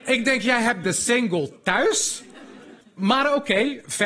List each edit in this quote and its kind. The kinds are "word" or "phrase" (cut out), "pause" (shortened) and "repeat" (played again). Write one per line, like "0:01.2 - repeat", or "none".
0:02.8 - pause